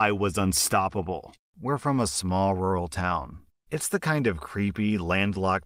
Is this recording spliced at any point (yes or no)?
no